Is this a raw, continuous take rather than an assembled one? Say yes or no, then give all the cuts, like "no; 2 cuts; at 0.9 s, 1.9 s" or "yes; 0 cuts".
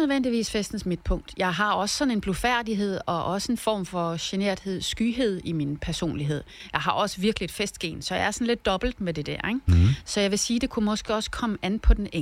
yes; 0 cuts